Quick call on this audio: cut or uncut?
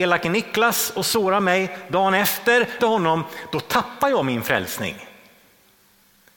cut